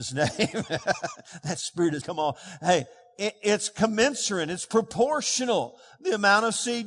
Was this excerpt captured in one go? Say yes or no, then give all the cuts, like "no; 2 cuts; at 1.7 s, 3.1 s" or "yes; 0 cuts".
no; 1 cut; at 2.0 s